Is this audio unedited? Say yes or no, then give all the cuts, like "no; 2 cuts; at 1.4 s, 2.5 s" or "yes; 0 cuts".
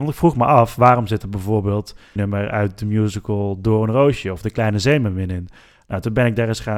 no; 1 cut; at 2.2 s